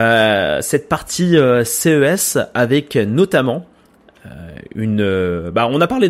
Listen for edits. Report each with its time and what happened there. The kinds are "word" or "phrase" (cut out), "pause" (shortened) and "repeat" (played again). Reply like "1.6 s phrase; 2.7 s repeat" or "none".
none